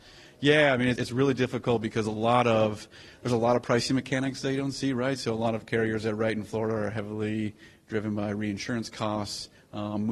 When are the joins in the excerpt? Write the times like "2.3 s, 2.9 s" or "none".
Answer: 1.0 s